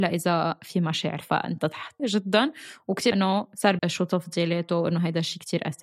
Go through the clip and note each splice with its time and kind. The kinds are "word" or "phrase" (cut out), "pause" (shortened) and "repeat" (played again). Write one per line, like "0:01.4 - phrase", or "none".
0:01.2 - word
0:02.0 - word
0:03.1 - word
0:03.8 - word